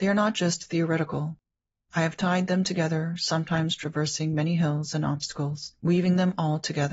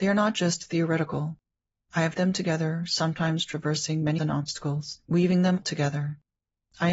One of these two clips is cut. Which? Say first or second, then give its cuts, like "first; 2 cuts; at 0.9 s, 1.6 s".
second; 3 cuts; at 2.2 s, 4.2 s, 5.6 s